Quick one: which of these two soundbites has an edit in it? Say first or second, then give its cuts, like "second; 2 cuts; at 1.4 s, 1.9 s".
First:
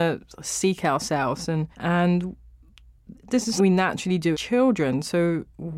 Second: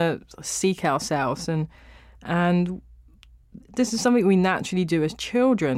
first; 3 cuts; at 1.7 s, 3.6 s, 4.3 s